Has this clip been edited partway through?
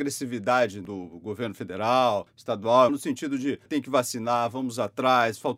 yes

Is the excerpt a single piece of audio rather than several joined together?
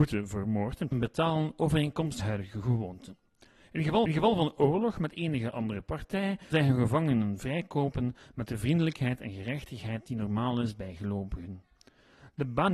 no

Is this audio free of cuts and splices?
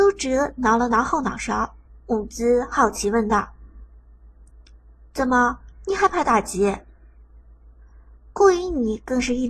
no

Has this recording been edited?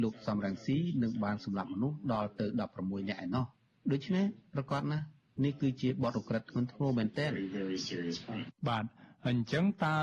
no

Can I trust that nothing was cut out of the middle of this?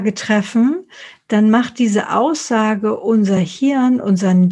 yes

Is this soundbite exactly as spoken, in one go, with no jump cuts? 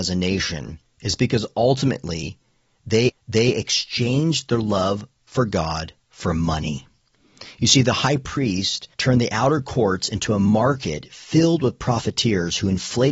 no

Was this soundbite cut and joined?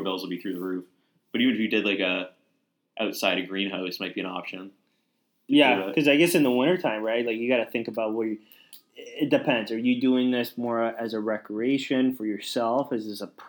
no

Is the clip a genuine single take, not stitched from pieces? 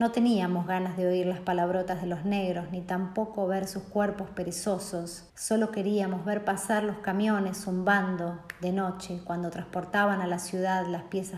no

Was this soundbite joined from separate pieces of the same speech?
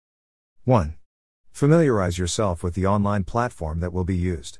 no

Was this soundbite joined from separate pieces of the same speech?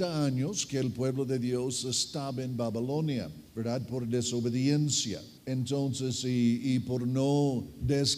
yes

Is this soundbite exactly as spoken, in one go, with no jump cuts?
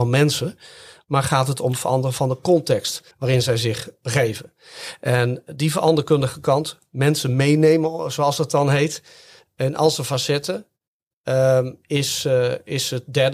no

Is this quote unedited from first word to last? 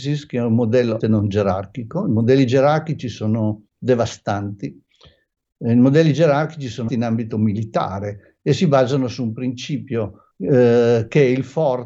no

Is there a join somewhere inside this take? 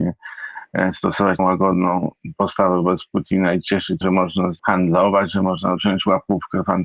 yes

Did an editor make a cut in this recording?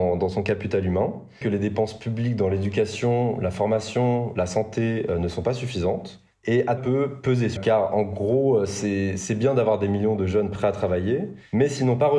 yes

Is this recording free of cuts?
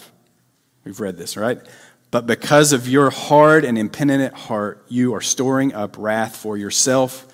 yes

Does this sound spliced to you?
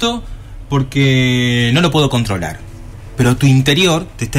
no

